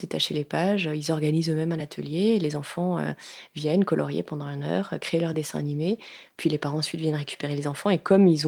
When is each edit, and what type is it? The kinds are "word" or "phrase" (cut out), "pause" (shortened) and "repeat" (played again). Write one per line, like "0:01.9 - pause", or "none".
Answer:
none